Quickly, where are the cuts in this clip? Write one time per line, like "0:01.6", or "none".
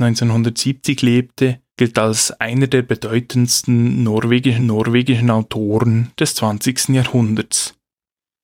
0:01.7
0:04.6